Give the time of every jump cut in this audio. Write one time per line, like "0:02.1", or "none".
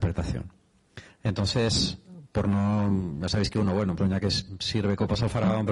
0:01.1
0:04.0